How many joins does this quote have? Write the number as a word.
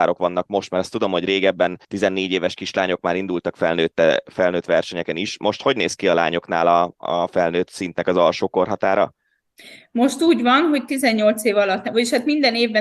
one